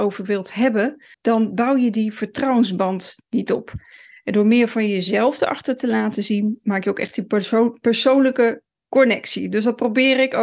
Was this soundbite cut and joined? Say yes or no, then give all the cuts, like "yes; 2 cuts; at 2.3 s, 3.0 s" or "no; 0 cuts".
yes; 1 cut; at 1.1 s